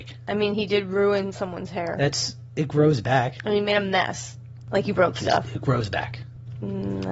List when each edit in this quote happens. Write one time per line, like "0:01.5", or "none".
none